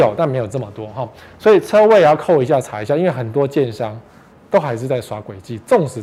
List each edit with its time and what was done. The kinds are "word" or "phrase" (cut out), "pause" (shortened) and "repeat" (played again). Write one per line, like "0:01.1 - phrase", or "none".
none